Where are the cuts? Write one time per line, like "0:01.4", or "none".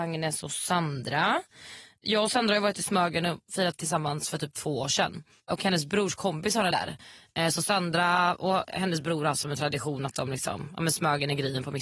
0:03.8
0:05.4
0:06.7